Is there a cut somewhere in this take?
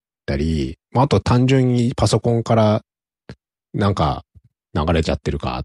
no; 0 cuts

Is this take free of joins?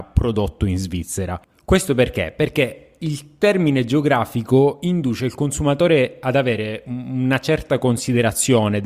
yes; 0 cuts

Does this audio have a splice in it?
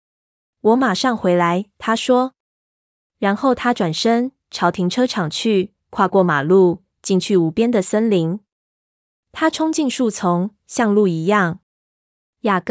no; 0 cuts

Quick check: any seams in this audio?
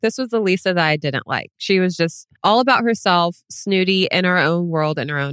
yes; 1 cut; at 2.4 s

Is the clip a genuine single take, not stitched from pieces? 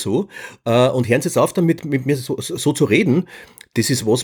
yes; 0 cuts

